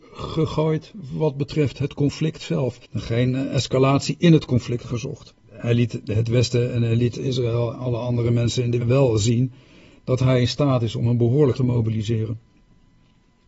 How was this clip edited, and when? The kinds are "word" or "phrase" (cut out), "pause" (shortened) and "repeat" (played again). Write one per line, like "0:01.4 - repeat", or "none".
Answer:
0:02.8 - pause
0:05.4 - pause
0:07.7 - word
0:08.8 - phrase
0:11.5 - word

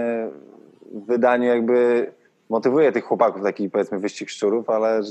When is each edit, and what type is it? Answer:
none

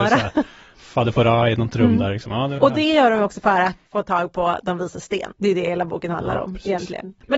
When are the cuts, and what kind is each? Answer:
0:02.6 - word
0:03.9 - word
0:05.4 - pause

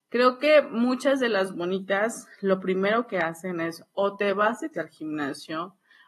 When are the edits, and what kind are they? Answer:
0:04.7 - word

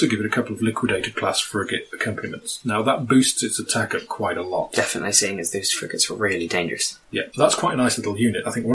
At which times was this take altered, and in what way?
0:07.3 - word

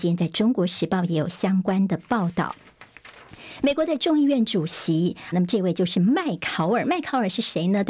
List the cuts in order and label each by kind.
0:05.3 - word

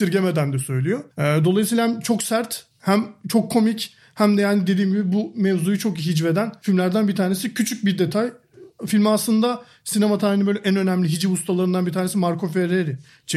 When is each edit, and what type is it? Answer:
0:01.1 - pause

